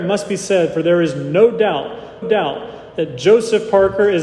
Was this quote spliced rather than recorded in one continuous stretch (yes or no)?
yes